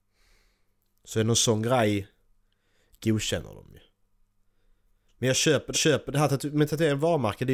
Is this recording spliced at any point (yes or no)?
yes